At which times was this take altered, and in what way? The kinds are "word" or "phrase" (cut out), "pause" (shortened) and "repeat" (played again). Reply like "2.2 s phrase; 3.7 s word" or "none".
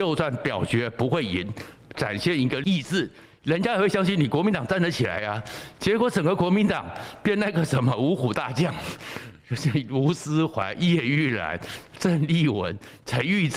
1.9 s phrase